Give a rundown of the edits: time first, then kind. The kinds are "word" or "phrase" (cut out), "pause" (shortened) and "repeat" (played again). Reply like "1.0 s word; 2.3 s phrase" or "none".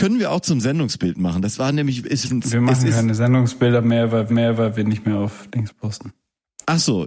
2.2 s phrase; 4.3 s repeat